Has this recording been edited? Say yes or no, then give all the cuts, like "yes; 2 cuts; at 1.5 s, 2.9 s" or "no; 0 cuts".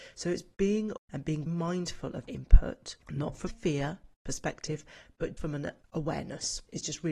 yes; 5 cuts; at 1.0 s, 1.5 s, 2.2 s, 3.5 s, 5.4 s